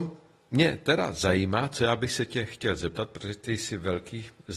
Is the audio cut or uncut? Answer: uncut